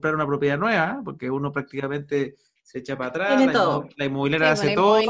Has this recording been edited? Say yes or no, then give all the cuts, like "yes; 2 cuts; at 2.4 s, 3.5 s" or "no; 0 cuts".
no; 0 cuts